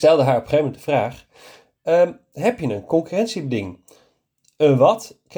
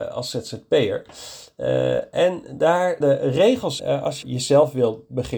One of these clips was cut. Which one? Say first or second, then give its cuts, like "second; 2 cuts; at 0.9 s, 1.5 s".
second; 3 cuts; at 3.0 s, 3.8 s, 4.2 s